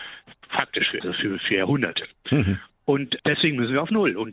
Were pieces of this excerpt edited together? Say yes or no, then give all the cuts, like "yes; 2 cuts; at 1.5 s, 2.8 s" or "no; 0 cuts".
yes; 2 cuts; at 1.0 s, 3.2 s